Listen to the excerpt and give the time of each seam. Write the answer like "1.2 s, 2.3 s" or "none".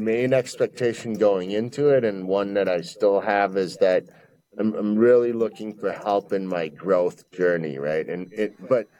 none

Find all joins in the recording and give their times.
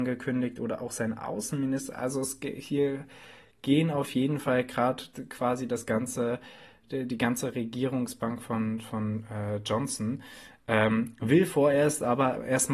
none

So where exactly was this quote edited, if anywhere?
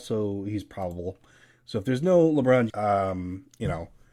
2.7 s

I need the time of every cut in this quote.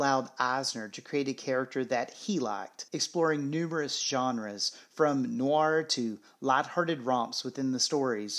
2.9 s

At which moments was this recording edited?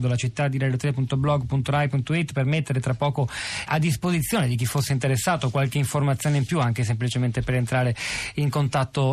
3.7 s

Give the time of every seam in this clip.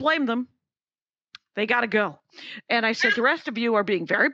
none

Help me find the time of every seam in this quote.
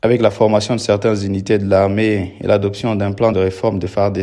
3.3 s

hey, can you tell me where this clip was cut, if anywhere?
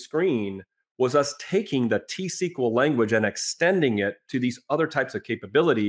none

